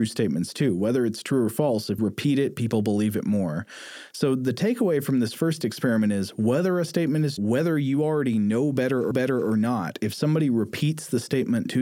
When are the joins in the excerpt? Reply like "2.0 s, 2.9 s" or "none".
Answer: 2.0 s, 7.4 s, 9.1 s